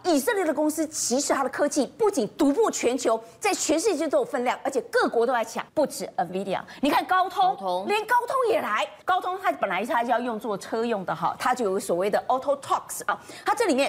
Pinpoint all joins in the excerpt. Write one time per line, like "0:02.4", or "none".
0:05.7
0:09.0